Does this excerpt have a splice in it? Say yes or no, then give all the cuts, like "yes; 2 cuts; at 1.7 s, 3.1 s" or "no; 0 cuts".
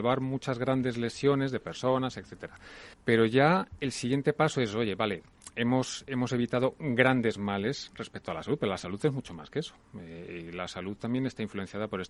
yes; 1 cut; at 2.9 s